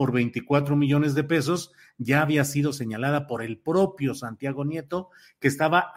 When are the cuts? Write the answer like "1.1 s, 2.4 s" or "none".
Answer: none